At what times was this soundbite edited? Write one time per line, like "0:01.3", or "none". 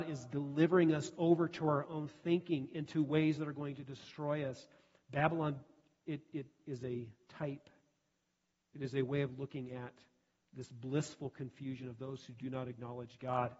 none